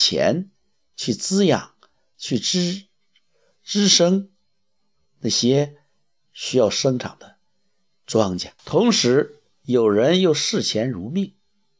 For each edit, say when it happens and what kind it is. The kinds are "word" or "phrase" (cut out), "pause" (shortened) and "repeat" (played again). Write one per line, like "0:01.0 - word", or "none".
0:08.6 - pause